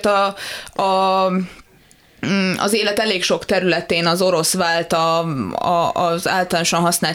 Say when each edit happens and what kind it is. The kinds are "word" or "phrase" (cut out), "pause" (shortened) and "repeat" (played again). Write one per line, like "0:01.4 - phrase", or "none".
none